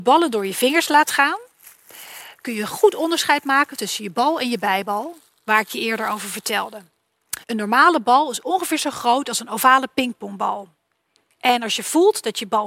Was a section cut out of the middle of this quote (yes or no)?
yes